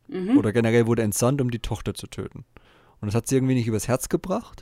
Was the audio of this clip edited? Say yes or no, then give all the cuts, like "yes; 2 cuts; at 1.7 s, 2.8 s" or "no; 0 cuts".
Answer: no; 0 cuts